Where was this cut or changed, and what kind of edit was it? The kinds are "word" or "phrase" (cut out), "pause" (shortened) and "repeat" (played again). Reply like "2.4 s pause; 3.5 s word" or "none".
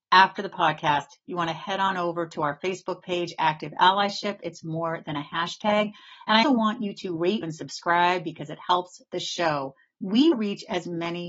6.4 s word; 7.4 s word; 10.3 s word